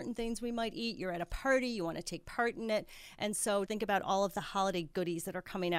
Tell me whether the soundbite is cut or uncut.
cut